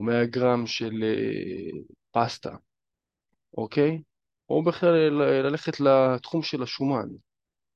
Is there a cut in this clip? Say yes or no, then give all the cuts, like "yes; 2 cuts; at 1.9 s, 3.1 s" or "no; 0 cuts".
no; 0 cuts